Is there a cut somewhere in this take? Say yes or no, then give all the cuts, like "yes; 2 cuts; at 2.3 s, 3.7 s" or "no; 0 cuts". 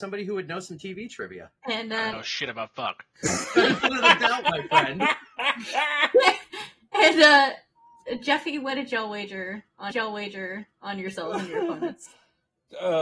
yes; 2 cuts; at 1.6 s, 9.9 s